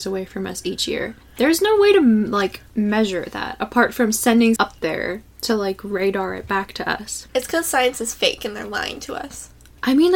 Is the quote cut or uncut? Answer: cut